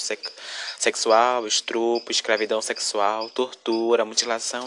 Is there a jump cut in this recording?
no; 0 cuts

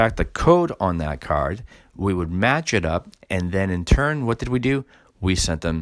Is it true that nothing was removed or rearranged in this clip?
yes; 0 cuts

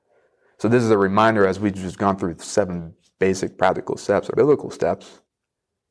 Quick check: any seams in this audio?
yes; 1 cut; at 4.3 s

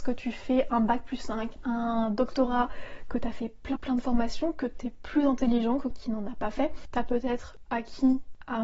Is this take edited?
yes; 2 cuts; at 3.8 s, 5.9 s

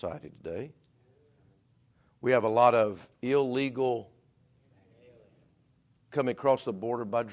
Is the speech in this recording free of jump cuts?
yes; 0 cuts

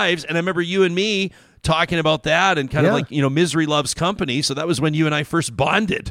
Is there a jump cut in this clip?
no; 0 cuts

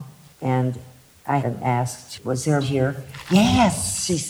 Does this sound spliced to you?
yes; 2 cuts; at 1.4 s, 2.6 s

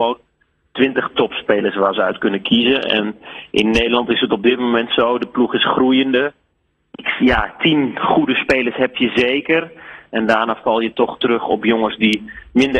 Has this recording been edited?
no; 0 cuts

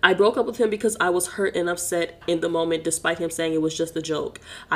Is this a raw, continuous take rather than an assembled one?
yes; 0 cuts

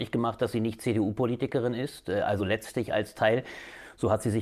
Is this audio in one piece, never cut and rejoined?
yes; 0 cuts

